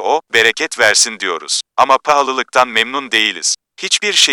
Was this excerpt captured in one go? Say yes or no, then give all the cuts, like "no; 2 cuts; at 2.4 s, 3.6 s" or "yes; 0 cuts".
no; 1 cut; at 1.7 s